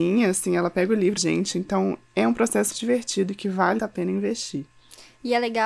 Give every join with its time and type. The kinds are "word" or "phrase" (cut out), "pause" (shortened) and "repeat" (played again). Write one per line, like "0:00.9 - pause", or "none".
0:01.2 - phrase
0:02.7 - word
0:03.8 - word